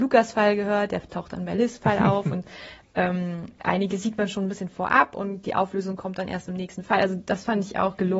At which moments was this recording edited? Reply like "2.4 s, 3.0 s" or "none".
none

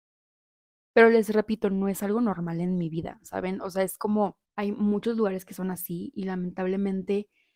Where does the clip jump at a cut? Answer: 4.4 s

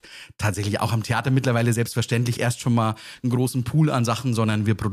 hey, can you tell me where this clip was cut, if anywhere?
2.4 s

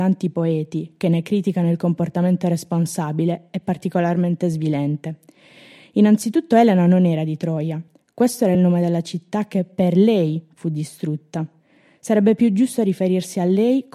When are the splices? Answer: none

